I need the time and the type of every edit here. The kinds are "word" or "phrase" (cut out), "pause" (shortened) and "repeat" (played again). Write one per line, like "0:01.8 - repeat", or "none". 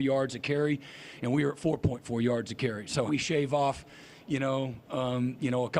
0:03.1 - phrase